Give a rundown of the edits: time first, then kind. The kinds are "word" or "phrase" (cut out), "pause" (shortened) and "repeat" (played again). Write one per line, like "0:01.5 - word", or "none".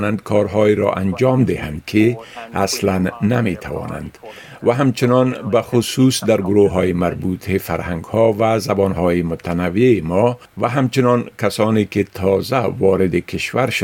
none